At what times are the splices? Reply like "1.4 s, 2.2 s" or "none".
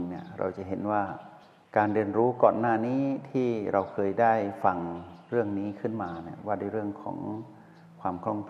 none